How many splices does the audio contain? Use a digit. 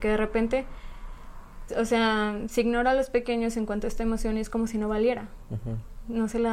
1